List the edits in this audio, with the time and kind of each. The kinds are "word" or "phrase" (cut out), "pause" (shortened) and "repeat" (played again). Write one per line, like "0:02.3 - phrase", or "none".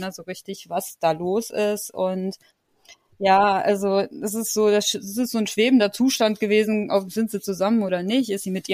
none